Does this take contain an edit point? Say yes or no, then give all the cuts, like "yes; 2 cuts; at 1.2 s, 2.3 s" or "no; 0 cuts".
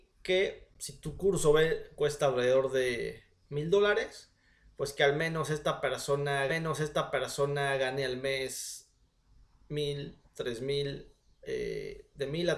yes; 1 cut; at 6.5 s